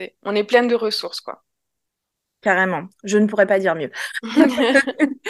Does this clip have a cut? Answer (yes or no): no